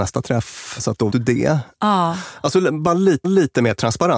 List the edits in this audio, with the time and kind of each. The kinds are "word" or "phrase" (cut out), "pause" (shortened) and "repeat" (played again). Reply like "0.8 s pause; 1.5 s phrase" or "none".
1.1 s word; 3.2 s repeat